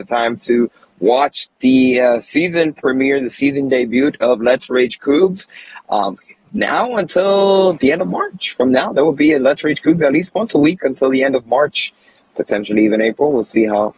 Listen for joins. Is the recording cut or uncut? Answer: uncut